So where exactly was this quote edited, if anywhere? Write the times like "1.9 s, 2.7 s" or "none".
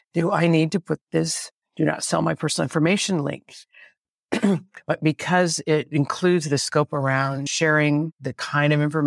none